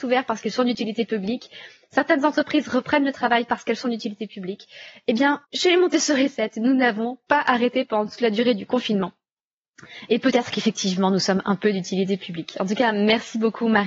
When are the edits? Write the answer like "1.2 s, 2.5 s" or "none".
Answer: 5.4 s